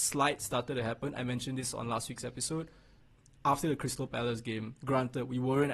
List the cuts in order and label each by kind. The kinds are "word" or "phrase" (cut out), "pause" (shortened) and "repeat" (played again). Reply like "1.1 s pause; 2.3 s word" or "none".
none